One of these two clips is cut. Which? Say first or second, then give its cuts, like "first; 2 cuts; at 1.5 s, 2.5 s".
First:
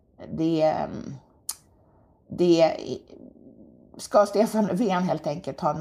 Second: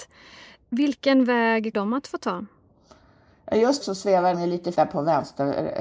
second; 4 cuts; at 1.7 s, 3.8 s, 4.3 s, 4.7 s